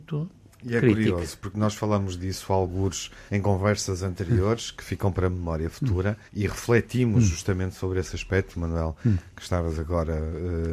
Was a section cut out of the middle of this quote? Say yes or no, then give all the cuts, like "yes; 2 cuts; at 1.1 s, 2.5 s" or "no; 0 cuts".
yes; 2 cuts; at 3.3 s, 6.3 s